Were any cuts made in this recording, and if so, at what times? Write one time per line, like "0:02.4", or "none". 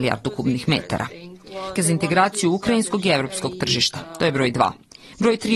0:01.8

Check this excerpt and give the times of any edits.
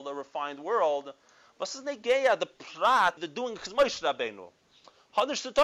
0:03.2

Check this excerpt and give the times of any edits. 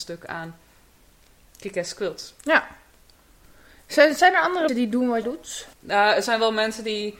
0:04.7
0:05.2
0:05.7

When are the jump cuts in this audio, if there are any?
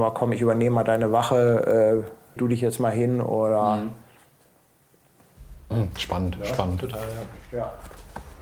0:02.4

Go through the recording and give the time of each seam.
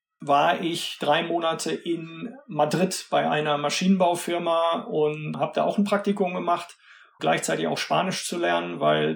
0:07.2

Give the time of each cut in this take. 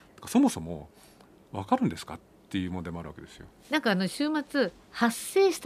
none

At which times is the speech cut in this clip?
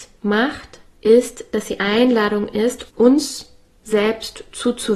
0:01.8
0:02.9

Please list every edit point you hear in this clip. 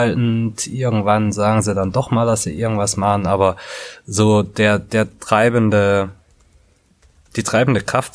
none

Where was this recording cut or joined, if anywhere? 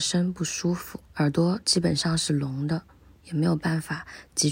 0:01.1

